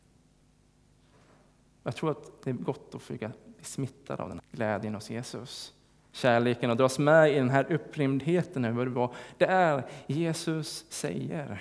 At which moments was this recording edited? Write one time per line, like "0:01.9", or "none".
0:04.4
0:06.0